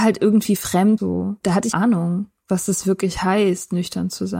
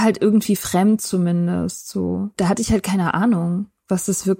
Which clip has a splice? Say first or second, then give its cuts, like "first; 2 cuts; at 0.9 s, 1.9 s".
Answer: first; 2 cuts; at 1.0 s, 1.7 s